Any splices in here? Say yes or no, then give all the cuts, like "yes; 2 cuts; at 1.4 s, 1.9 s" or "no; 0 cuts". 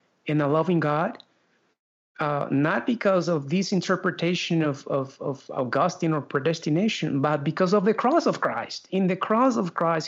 no; 0 cuts